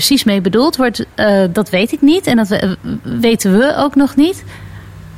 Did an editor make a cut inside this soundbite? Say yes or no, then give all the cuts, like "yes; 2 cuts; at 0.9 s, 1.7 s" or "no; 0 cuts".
no; 0 cuts